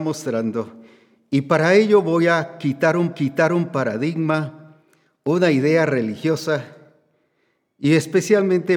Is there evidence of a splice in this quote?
yes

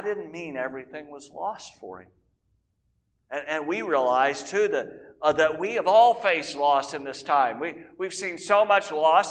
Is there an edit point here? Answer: no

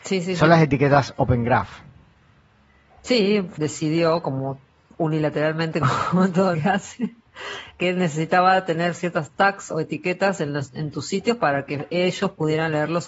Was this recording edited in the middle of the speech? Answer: yes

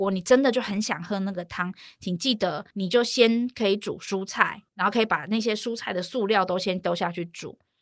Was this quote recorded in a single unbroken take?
no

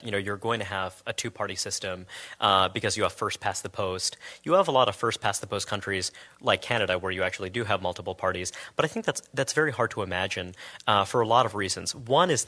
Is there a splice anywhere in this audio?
no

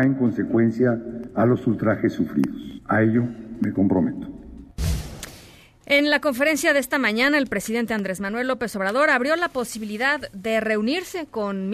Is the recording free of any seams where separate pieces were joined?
yes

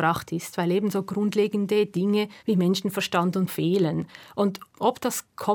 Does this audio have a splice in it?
yes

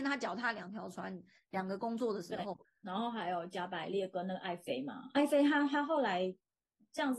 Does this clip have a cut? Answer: yes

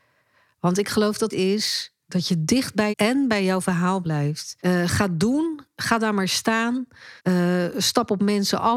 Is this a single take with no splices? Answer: no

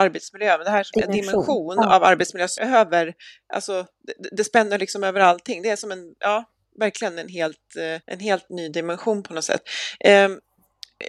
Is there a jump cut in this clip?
yes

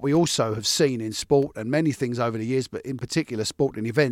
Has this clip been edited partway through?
no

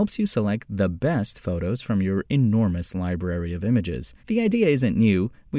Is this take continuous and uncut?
no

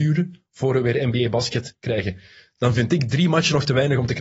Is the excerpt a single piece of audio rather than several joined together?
yes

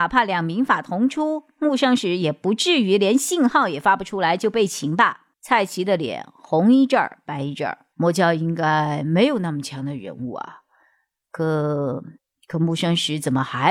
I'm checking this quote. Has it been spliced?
yes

